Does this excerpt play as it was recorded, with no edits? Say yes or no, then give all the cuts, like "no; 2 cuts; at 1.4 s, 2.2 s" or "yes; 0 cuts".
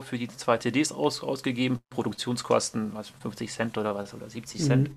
no; 1 cut; at 3.2 s